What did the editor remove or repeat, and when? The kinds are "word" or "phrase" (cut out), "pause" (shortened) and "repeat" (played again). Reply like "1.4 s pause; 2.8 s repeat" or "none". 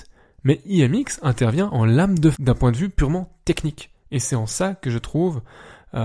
2.3 s word; 4.0 s pause